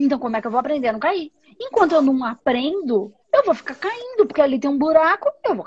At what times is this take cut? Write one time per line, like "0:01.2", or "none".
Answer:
0:01.4
0:03.2